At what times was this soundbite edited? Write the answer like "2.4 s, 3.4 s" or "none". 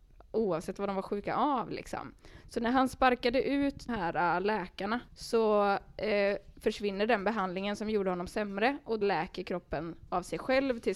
3.9 s, 5.1 s, 9.0 s